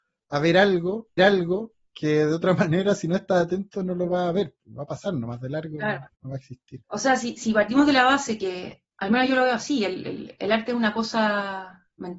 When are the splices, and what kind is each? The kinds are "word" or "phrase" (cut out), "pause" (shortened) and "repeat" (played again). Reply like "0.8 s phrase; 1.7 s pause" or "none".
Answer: 1.2 s repeat; 6.1 s pause; 6.8 s pause; 8.9 s pause

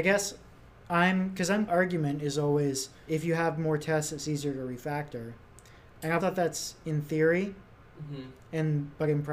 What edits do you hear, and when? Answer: 1.7 s phrase; 3.1 s word; 6.2 s word

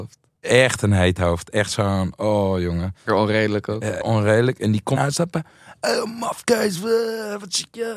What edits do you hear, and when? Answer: 3.1 s word; 4.0 s word; 5.0 s word

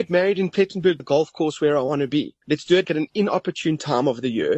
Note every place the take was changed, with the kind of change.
1.0 s word; 2.4 s pause; 2.8 s word

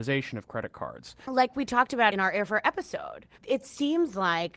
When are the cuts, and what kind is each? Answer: 3.3 s pause

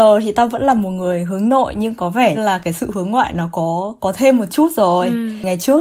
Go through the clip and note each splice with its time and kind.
2.3 s word

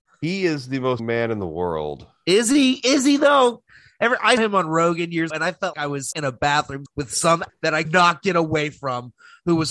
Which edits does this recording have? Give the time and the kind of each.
1.0 s word; 4.4 s word; 5.3 s word; 5.7 s word; 6.1 s word; 6.9 s word; 7.5 s word; 7.9 s word

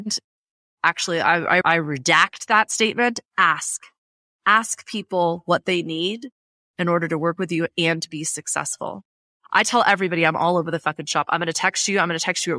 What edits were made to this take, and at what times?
1.6 s word

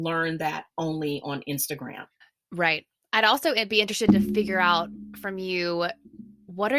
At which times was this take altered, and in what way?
2.2 s pause

